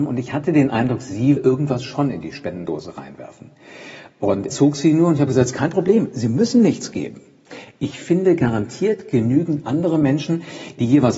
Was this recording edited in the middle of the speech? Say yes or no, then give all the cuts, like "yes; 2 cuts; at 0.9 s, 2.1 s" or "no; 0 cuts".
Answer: yes; 2 cuts; at 1.4 s, 4.5 s